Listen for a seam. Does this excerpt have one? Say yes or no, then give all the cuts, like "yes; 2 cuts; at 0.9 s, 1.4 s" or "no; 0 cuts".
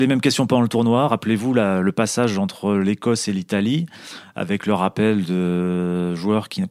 no; 0 cuts